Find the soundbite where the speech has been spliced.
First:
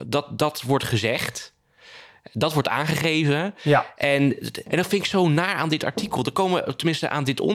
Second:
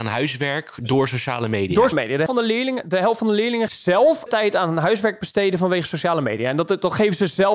second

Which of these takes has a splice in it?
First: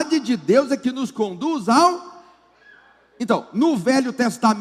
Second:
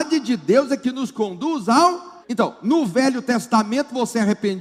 second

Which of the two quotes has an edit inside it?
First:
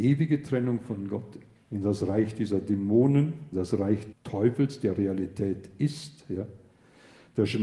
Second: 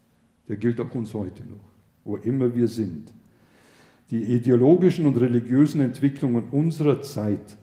first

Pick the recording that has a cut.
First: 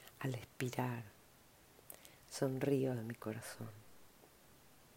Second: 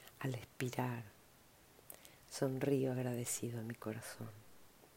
first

